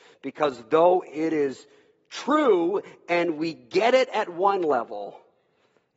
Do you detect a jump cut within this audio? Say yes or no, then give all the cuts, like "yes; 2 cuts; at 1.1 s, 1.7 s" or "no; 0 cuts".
no; 0 cuts